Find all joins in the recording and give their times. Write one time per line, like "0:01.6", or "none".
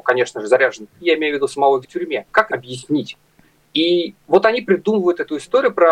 0:01.0
0:01.8
0:02.5